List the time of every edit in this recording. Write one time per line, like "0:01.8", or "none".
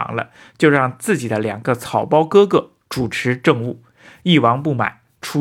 none